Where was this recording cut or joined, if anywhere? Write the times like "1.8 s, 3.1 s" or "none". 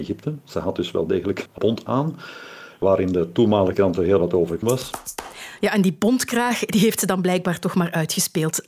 1.5 s, 3.7 s, 4.6 s